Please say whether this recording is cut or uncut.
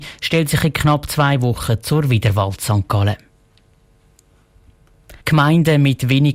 cut